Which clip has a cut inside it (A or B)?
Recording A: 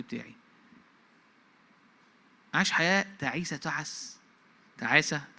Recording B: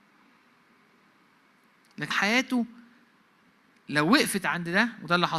B